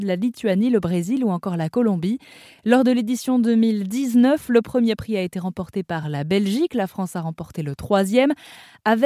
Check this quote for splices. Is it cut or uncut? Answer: uncut